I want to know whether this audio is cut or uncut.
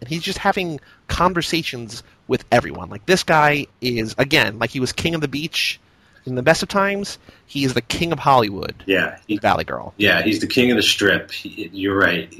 uncut